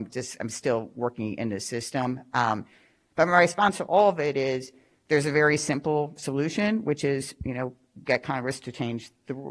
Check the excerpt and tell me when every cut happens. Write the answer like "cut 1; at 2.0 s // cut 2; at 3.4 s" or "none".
none